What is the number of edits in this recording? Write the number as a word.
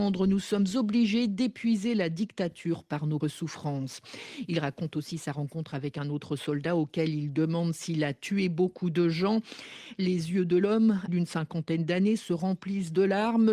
two